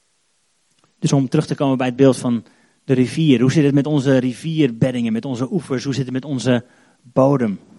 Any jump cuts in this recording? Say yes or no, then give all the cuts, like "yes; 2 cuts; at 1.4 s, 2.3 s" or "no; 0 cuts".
no; 0 cuts